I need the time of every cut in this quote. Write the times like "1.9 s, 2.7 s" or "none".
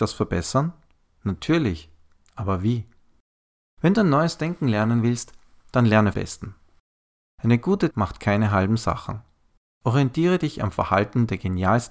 6.1 s, 7.9 s